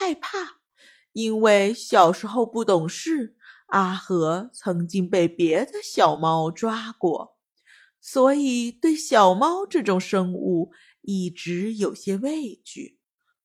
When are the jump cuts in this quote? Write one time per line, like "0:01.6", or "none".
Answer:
none